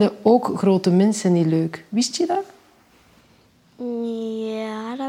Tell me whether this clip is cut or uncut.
uncut